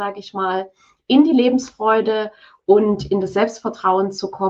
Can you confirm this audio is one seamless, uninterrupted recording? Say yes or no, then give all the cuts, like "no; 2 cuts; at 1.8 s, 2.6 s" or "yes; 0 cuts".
yes; 0 cuts